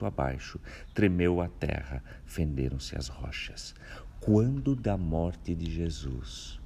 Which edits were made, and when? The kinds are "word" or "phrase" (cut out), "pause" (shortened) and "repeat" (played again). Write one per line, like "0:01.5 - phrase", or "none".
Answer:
none